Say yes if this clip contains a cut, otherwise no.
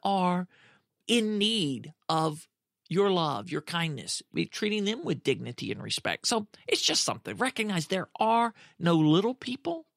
no